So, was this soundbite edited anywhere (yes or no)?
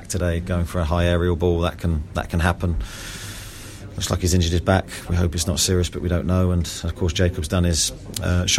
no